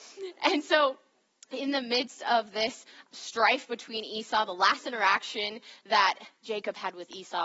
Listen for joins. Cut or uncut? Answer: cut